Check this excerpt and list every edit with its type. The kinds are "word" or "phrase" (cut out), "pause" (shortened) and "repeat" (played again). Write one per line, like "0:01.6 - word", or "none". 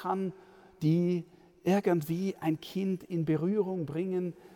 none